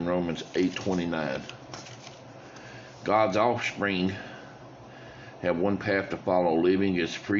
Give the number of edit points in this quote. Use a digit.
0